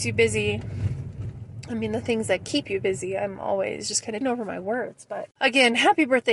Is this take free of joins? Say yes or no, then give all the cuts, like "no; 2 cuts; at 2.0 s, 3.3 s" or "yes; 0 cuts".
no; 1 cut; at 4.2 s